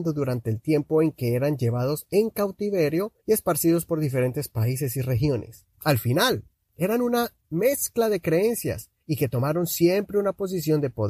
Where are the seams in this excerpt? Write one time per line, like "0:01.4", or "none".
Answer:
0:03.2
0:05.7
0:09.0